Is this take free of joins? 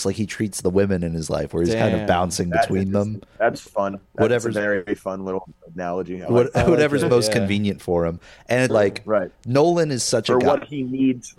no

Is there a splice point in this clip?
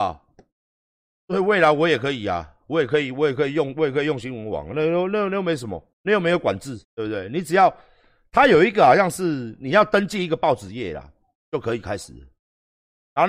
yes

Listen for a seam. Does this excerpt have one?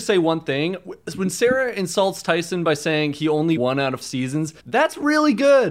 yes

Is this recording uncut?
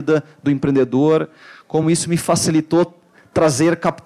yes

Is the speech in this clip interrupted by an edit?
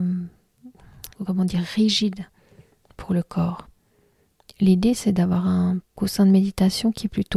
yes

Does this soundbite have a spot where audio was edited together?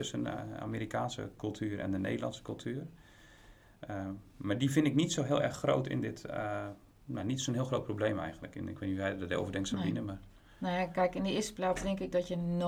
yes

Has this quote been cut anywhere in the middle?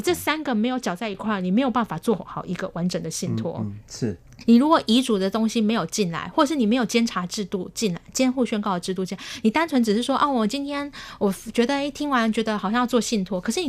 no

